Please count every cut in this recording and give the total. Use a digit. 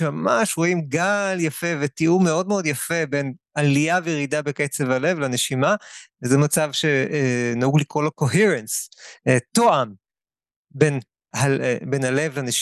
1